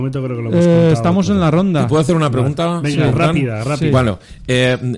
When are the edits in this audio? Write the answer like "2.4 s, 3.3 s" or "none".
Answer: none